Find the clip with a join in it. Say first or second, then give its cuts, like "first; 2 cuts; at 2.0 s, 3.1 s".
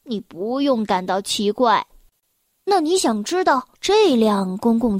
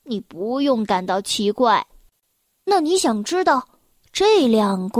first; 1 cut; at 3.7 s